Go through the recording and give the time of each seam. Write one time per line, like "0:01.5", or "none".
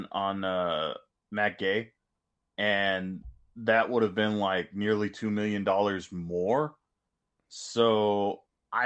none